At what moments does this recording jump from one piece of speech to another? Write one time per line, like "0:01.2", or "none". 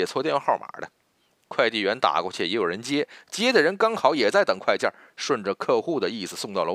none